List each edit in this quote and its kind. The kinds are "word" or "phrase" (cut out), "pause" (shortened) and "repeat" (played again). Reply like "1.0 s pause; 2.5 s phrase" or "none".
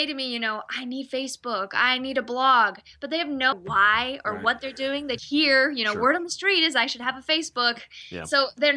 3.5 s word; 5.2 s word